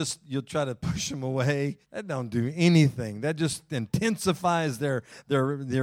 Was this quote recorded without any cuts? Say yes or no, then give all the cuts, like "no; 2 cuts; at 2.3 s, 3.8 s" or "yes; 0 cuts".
no; 1 cut; at 1.8 s